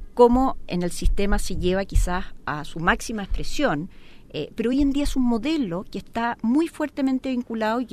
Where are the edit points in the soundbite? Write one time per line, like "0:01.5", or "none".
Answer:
none

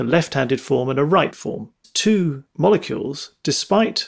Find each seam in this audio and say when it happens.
0:01.3
0:01.8

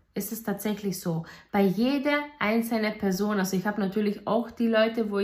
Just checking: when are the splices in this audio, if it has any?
none

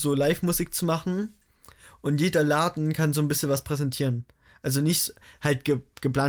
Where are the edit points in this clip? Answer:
none

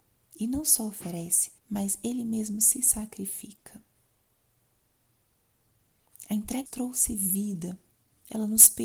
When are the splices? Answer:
0:01.6
0:06.7

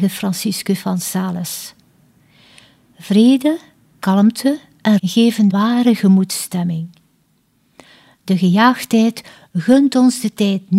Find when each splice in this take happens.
0:05.0
0:05.5

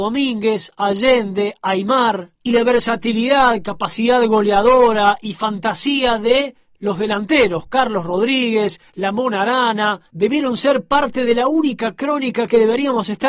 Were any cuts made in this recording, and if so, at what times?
none

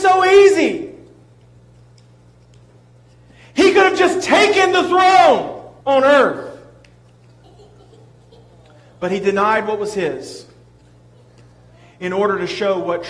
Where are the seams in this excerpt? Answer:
0:05.8

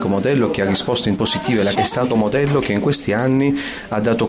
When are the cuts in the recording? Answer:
0:01.2
0:01.7
0:02.1

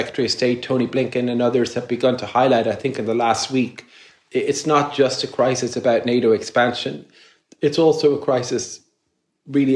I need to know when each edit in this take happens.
none

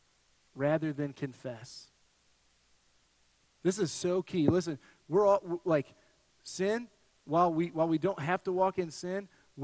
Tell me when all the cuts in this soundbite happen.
none

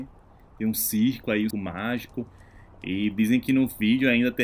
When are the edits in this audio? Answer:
0:01.5

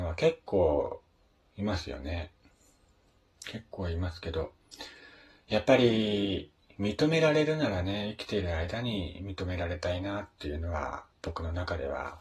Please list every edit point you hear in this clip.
0:11.1

